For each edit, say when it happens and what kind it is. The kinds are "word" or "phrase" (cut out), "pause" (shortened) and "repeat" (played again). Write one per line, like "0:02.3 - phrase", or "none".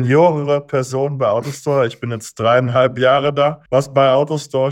0:03.7 - pause